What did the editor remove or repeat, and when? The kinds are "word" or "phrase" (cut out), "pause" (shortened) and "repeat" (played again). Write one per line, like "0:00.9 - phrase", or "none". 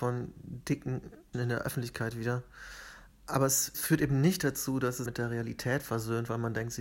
0:01.3 - word
0:03.7 - word
0:05.1 - word